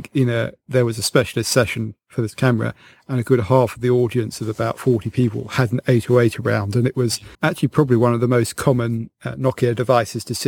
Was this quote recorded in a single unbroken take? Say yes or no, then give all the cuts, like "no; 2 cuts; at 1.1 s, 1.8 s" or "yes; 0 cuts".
no; 1 cut; at 7.3 s